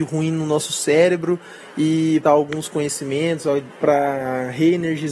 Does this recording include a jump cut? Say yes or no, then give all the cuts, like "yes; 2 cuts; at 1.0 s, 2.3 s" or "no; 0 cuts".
yes; 2 cuts; at 2.2 s, 3.7 s